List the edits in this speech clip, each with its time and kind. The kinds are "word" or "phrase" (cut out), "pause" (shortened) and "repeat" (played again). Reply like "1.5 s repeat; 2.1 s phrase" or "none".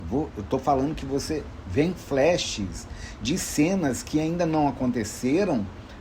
1.6 s word